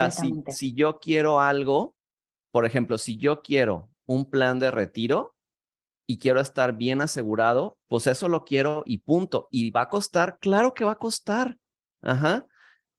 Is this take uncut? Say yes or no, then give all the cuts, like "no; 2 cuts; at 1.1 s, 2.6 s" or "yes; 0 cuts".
no; 1 cut; at 7.8 s